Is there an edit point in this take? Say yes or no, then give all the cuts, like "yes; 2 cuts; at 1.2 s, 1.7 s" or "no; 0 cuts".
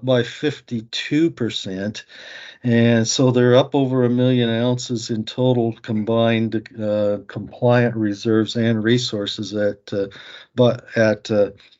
no; 0 cuts